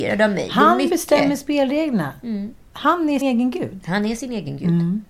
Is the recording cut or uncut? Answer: cut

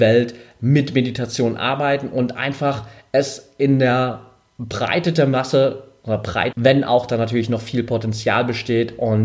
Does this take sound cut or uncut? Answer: cut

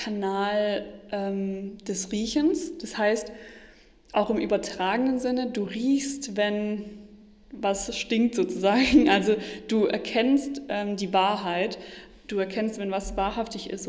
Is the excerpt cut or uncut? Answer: uncut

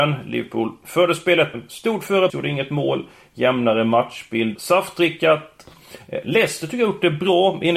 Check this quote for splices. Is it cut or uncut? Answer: cut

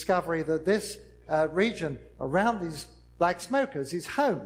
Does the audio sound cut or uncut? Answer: uncut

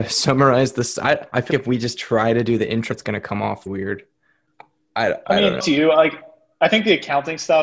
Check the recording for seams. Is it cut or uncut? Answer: cut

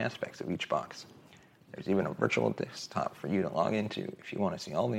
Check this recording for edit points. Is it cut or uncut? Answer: uncut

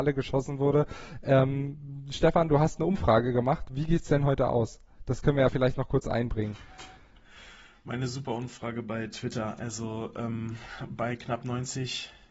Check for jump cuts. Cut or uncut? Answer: uncut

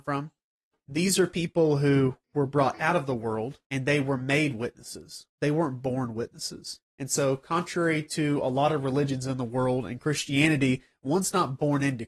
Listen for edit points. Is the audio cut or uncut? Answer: cut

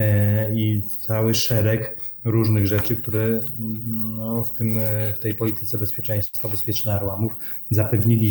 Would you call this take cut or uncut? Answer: uncut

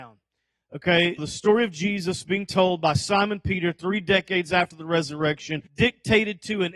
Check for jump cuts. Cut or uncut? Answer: cut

